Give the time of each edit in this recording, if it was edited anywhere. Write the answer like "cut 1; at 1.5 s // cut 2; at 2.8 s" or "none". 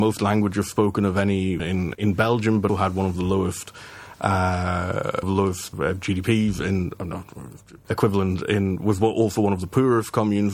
cut 1; at 1.6 s // cut 2; at 1.9 s // cut 3; at 2.7 s // cut 4; at 5.2 s // cut 5; at 5.7 s // cut 6; at 7.8 s

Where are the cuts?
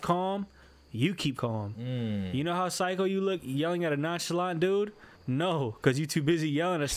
cut 1; at 1.4 s // cut 2; at 5.1 s

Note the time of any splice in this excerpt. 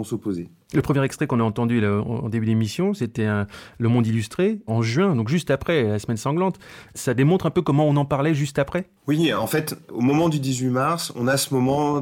none

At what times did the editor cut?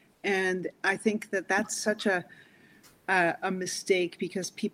none

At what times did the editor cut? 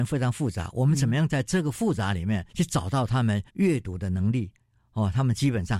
cut 1; at 2.5 s // cut 2; at 3.5 s

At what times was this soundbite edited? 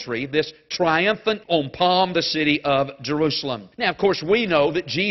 cut 1; at 1.4 s // cut 2; at 2.1 s // cut 3; at 3.7 s

